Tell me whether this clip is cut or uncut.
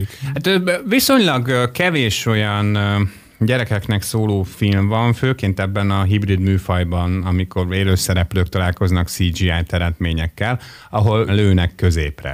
cut